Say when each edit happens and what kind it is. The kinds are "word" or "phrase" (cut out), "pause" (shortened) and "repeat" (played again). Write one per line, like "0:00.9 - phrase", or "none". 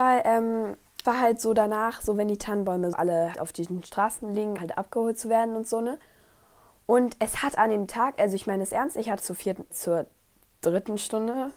0:01.0 - word
0:02.9 - word
0:03.3 - word
0:04.6 - word
0:09.2 - word
0:09.7 - word